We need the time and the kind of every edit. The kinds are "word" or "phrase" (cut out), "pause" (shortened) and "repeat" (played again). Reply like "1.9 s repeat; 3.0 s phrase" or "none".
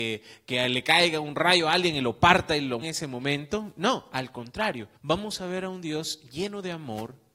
2.8 s phrase; 5.0 s pause